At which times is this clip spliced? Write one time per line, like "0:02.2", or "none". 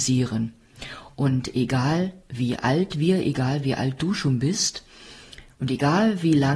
none